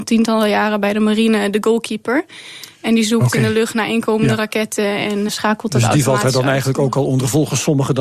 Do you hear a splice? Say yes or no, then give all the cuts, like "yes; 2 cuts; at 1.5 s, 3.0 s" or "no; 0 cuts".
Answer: yes; 1 cut; at 5.3 s